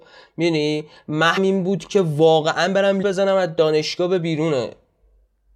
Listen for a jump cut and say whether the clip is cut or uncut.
cut